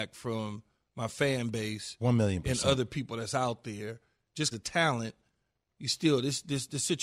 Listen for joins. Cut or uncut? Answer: cut